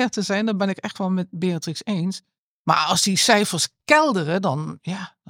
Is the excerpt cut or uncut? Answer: uncut